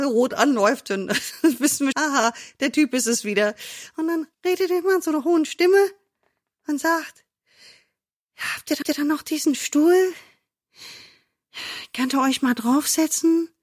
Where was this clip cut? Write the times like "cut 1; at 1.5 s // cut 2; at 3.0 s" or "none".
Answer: cut 1; at 1.9 s // cut 2; at 4.3 s // cut 3; at 8.8 s